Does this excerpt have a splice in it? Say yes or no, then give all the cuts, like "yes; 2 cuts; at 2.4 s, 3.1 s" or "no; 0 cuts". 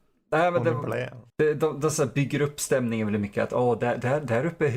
yes; 1 cut; at 1.3 s